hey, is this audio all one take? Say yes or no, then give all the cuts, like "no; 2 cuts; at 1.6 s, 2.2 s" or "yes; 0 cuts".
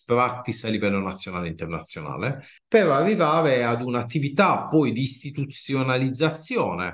yes; 0 cuts